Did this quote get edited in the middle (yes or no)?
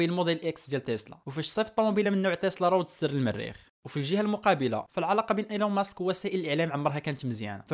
no